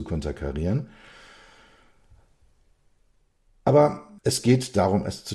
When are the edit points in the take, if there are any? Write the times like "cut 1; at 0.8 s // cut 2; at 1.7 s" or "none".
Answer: cut 1; at 4.2 s